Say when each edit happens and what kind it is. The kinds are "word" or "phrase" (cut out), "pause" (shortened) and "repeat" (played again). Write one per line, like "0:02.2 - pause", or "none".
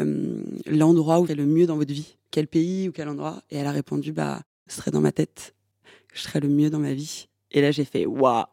0:01.3 - word
0:02.3 - word